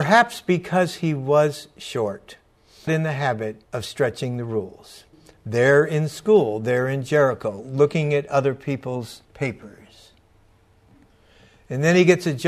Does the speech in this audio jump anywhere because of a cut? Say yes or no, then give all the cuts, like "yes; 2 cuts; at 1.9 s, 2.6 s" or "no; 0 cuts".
yes; 4 cuts; at 2.9 s, 3.6 s, 5.1 s, 9.2 s